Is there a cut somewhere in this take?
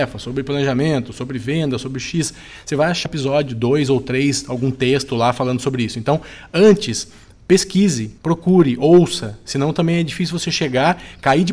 yes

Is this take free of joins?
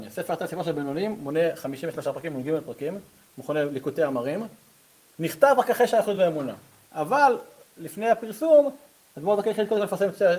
yes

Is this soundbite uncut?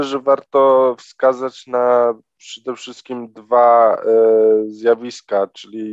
yes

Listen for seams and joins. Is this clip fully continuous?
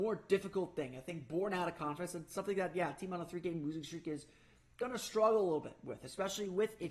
yes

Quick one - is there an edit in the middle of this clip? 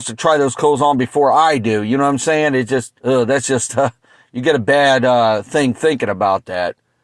yes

